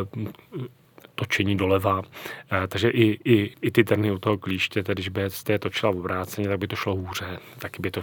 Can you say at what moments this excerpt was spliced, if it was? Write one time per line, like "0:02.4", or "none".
0:03.5